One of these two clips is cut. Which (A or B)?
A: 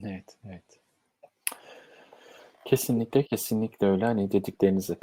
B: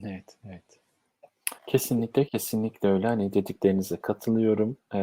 B